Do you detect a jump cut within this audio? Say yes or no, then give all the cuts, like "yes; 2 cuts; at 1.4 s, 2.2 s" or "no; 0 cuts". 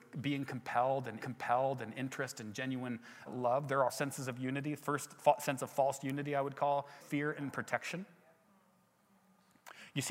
yes; 4 cuts; at 1.2 s, 3.3 s, 3.9 s, 7.0 s